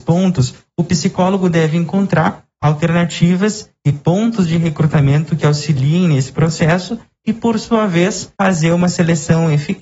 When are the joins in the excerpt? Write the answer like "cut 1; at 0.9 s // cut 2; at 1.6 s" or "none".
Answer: cut 1; at 8.4 s